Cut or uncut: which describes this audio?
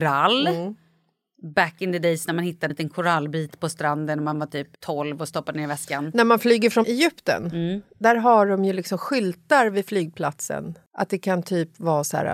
cut